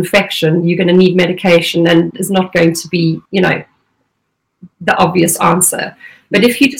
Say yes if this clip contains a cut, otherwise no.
yes